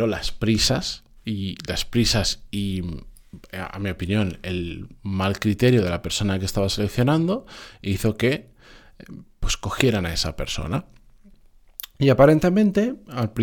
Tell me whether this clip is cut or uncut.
cut